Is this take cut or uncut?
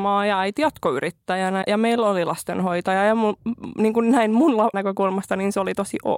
cut